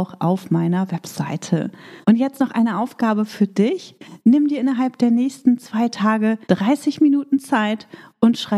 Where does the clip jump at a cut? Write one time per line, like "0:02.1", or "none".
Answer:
0:02.0
0:06.4